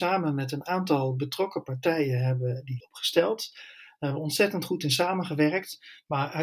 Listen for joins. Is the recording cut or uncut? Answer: cut